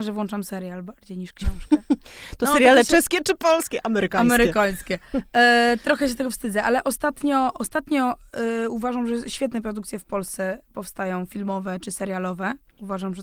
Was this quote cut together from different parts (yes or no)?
no